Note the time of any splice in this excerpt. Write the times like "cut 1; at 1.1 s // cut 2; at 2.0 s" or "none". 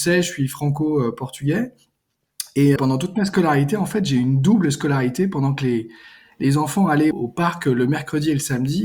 cut 1; at 2.8 s // cut 2; at 7.1 s